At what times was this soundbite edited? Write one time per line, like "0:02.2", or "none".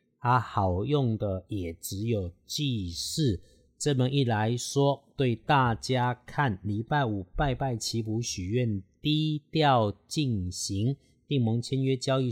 none